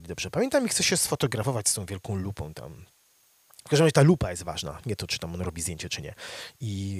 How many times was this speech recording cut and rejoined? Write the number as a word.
zero